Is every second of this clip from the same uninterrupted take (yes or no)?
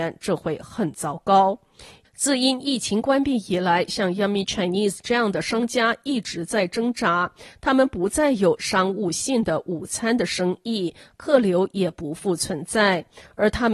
yes